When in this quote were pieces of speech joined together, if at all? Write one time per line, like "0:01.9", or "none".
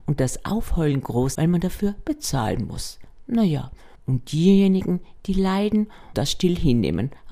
0:01.3
0:04.0
0:06.1